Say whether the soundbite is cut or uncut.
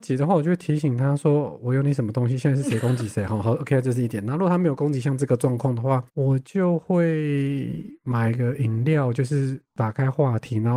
cut